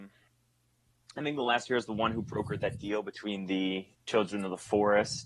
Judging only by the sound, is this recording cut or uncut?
cut